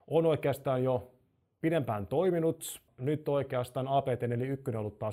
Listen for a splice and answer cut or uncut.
cut